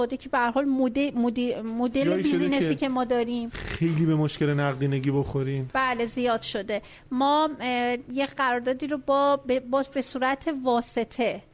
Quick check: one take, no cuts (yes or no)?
yes